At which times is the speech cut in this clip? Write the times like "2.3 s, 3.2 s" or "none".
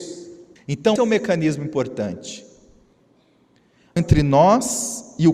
1.0 s, 4.0 s